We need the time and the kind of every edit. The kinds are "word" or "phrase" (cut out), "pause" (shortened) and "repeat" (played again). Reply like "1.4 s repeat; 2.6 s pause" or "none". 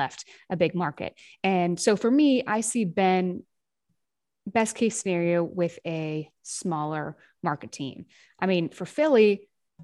none